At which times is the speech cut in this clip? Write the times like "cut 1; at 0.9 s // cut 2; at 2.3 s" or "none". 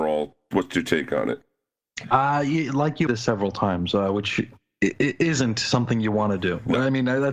cut 1; at 3.1 s